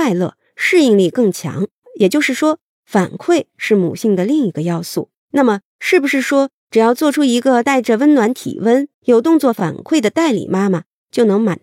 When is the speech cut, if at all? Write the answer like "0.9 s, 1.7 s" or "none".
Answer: 1.8 s, 5.2 s, 8.9 s